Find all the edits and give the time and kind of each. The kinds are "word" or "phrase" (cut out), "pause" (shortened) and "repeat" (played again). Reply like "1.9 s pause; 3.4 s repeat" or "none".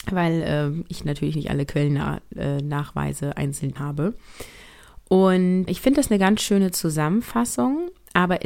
3.8 s word; 5.7 s word